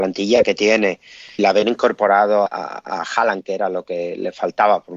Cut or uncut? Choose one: cut